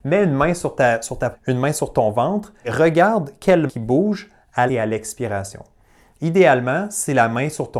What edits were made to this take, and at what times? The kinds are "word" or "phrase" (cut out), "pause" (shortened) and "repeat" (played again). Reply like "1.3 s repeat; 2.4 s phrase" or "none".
1.3 s word; 2.6 s word; 3.7 s word; 4.7 s word

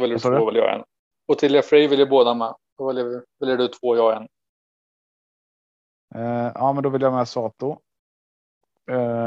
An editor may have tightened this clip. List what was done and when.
none

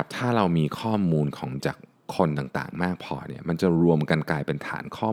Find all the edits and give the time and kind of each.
1.6 s word

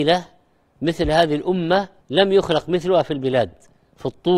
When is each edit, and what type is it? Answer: 2.0 s pause

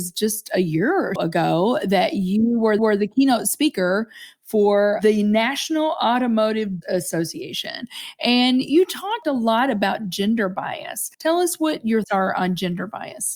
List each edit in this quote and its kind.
1.2 s word; 2.8 s repeat; 6.8 s word; 11.1 s pause; 12.0 s word

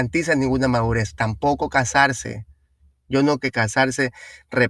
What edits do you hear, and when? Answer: 3.4 s word

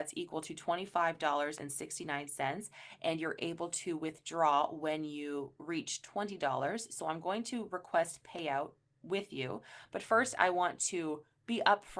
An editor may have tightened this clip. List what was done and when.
none

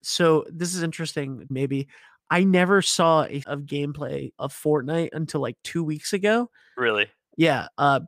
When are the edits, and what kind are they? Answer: 1.5 s phrase; 3.4 s phrase; 4.4 s word

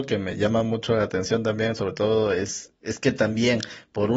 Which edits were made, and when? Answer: 2.8 s pause

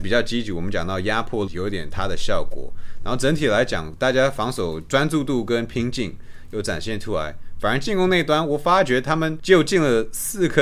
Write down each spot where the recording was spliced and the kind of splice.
1.5 s word

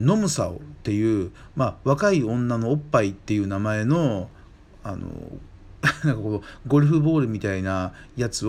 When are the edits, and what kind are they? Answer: none

